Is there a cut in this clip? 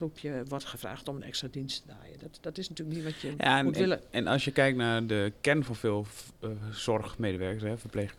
no; 0 cuts

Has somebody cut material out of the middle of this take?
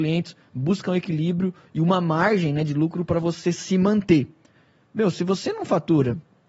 no; 0 cuts

